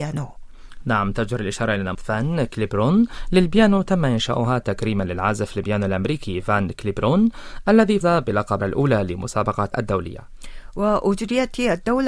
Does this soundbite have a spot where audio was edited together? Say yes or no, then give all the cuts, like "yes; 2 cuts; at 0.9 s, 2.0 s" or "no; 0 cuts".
yes; 4 cuts; at 1.9 s, 8.0 s, 8.6 s, 9.7 s